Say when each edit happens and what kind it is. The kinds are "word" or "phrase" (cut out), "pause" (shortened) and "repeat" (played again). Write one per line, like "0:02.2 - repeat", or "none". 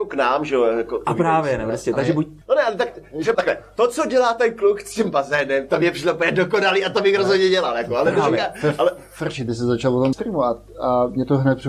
0:02.4 - pause
0:03.3 - word
0:10.1 - word